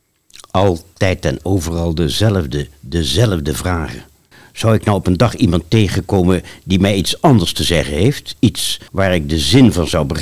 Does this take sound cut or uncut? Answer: cut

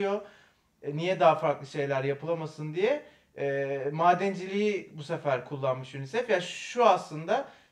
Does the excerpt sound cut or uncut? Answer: uncut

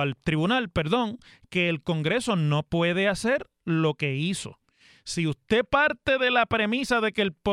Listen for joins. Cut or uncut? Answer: uncut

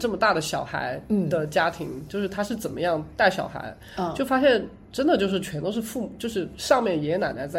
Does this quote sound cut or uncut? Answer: uncut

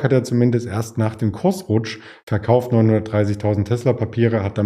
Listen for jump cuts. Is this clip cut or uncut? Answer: uncut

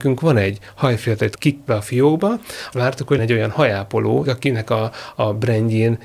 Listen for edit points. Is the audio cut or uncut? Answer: cut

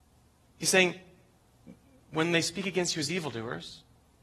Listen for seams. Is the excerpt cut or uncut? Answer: uncut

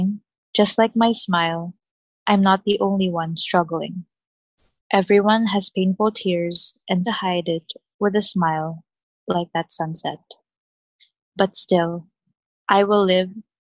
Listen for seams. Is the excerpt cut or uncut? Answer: cut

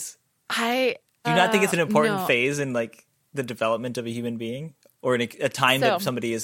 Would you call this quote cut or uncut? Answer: cut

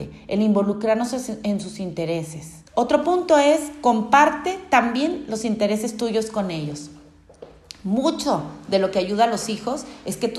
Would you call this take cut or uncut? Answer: cut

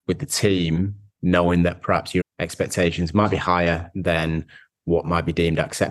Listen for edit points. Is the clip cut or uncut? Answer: cut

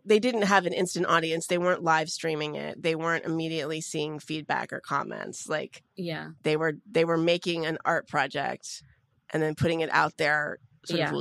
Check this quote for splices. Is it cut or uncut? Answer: uncut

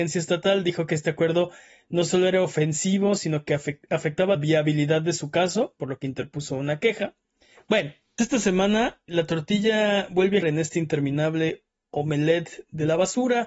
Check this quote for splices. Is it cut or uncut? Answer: cut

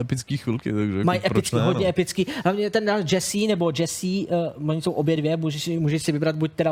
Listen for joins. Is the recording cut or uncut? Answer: uncut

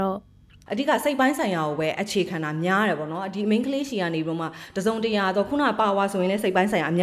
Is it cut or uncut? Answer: uncut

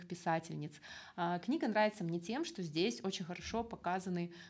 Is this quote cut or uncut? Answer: uncut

